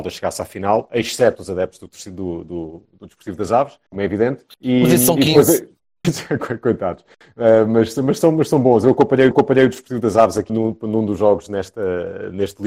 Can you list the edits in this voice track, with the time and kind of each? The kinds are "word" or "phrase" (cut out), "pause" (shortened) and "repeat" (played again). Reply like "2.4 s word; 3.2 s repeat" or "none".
3.9 s pause; 4.5 s pause; 6.0 s word; 9.3 s repeat; 10.5 s word